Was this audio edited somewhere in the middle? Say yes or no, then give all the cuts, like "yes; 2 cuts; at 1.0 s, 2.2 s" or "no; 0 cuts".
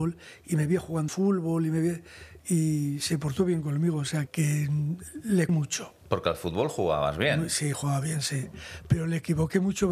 yes; 3 cuts; at 1.1 s, 4.3 s, 5.5 s